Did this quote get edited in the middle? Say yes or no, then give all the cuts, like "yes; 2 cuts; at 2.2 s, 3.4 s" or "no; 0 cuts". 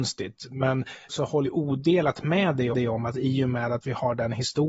yes; 3 cuts; at 1.1 s, 1.5 s, 2.7 s